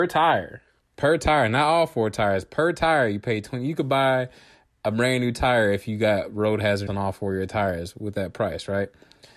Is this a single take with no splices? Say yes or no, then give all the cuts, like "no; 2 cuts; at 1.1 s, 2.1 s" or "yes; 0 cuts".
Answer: no; 1 cut; at 6.9 s